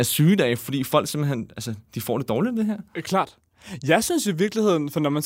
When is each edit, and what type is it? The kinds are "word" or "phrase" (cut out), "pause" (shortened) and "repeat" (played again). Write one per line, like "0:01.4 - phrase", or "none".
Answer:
0:01.8 - pause

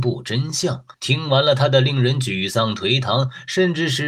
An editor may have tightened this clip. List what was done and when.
0:00.9 - pause

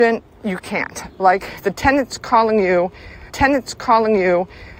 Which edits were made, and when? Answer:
0:01.6 - word
0:03.3 - repeat

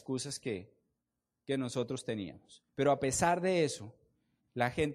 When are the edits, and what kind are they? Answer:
0:02.7 - pause

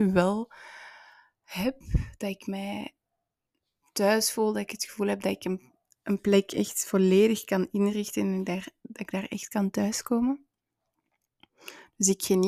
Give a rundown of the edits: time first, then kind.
none

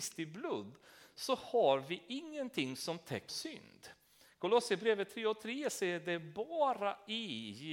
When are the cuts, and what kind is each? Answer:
0:03.3 - word

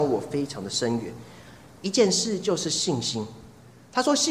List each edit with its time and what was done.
none

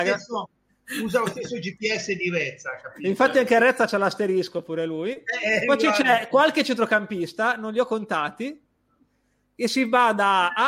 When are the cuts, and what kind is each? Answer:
none

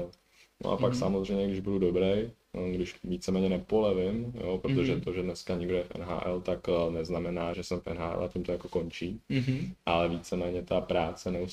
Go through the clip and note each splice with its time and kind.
0:07.5 - word

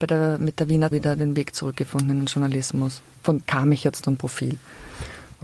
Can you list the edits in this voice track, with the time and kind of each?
0:00.9 - word
0:03.0 - word
0:03.5 - word
0:04.0 - word

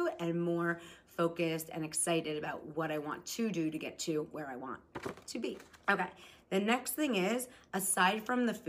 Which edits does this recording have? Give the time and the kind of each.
0:05.8 - pause

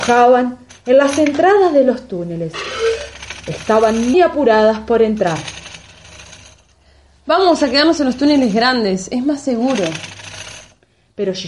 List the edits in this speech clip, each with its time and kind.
0:04.1 - word

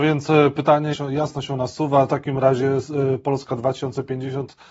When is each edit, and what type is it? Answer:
0:00.9 - word
0:02.1 - phrase

